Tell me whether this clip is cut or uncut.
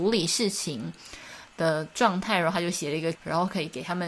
cut